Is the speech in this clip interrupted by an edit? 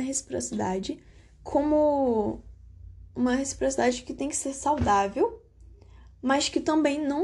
no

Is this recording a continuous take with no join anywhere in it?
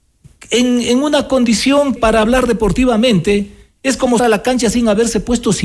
no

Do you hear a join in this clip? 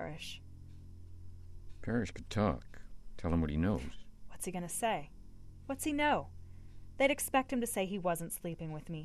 no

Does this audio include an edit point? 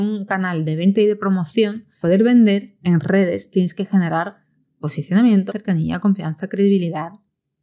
yes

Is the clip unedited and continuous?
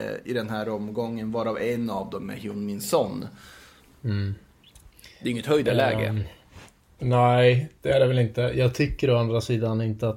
yes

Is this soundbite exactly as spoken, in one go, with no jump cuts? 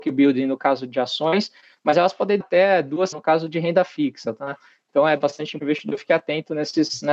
no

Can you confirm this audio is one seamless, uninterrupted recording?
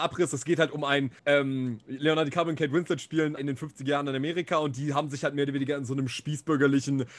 no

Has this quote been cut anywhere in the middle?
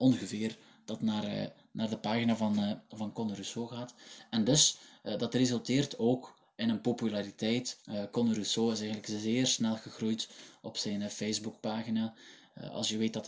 yes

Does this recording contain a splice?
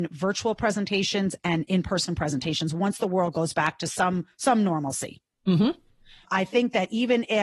no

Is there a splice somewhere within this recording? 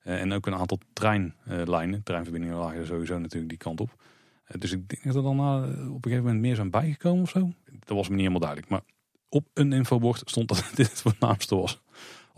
no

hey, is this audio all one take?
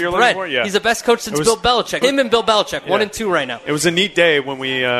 no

